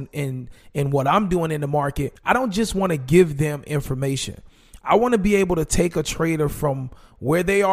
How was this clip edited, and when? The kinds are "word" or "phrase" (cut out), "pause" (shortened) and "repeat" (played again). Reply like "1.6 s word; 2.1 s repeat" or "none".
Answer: 2.2 s pause